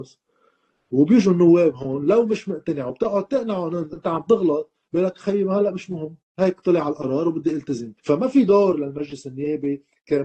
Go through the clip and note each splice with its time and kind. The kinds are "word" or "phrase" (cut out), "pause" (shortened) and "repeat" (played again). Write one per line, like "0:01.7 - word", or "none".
0:08.0 - pause